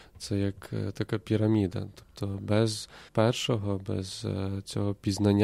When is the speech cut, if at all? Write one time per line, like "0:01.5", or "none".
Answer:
0:03.1